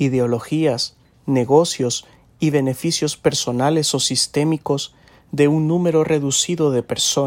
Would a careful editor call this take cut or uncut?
cut